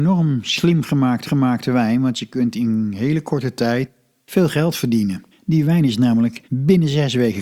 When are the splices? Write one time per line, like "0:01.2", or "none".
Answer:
0:01.2
0:05.3
0:06.4